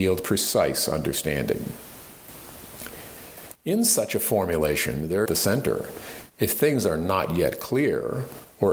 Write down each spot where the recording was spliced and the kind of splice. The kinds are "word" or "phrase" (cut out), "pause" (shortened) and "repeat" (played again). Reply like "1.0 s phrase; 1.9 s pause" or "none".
5.3 s phrase